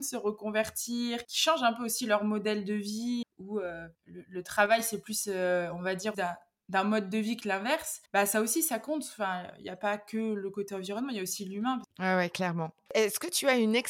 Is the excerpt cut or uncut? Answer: cut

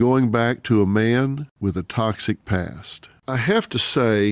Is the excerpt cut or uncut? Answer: uncut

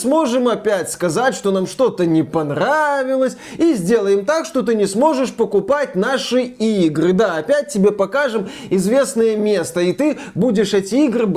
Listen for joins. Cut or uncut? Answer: uncut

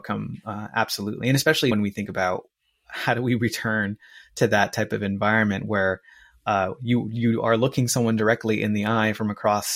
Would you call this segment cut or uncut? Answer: cut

